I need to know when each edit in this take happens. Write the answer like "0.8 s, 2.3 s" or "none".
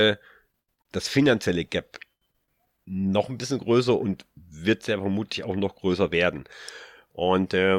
none